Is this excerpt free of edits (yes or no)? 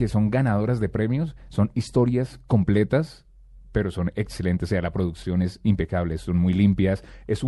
yes